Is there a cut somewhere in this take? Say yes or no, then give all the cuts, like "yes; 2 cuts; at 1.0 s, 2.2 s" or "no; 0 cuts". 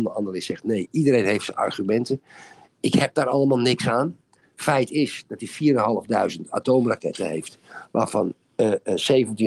no; 0 cuts